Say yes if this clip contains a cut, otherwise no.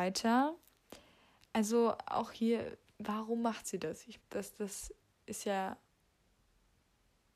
yes